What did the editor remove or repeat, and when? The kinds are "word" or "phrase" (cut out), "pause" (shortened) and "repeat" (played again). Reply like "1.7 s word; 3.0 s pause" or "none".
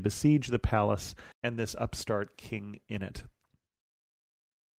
1.3 s pause